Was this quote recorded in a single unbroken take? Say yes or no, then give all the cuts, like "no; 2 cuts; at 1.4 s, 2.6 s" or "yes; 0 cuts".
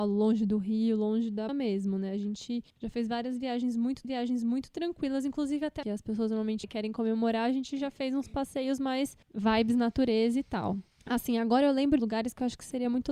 no; 8 cuts; at 1.5 s, 2.7 s, 4.0 s, 5.8 s, 6.6 s, 9.2 s, 10.9 s, 12.0 s